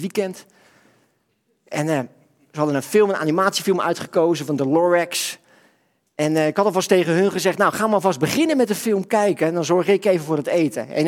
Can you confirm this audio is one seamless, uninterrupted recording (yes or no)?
yes